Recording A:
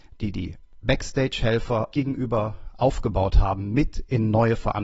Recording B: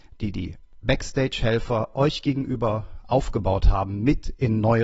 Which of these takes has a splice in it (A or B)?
A